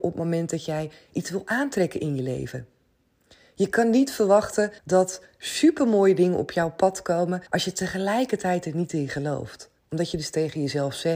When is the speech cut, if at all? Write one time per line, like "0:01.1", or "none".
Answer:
0:04.8
0:07.5
0:09.8